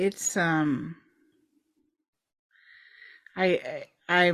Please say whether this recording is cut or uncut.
uncut